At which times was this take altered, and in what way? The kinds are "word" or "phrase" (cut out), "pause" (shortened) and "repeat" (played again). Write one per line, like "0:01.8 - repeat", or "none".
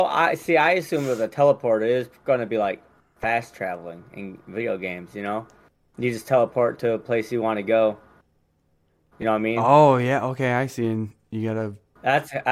none